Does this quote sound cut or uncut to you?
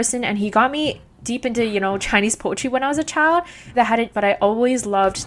cut